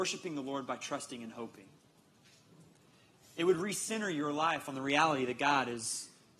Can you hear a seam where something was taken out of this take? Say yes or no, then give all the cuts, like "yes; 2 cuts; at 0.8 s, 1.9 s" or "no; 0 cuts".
no; 0 cuts